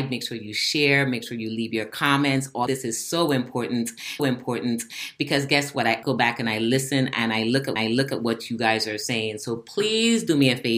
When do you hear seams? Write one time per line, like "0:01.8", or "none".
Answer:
0:02.7
0:04.2
0:06.0
0:07.8